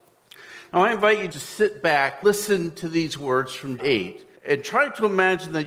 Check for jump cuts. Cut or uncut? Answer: cut